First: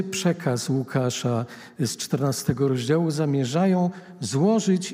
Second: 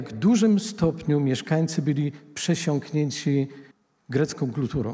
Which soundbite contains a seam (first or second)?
second